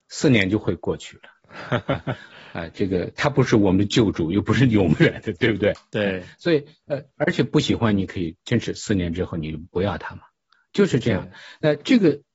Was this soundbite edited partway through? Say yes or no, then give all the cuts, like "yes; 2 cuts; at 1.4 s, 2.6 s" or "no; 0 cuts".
no; 0 cuts